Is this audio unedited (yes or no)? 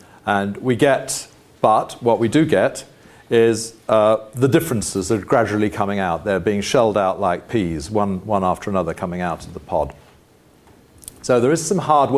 yes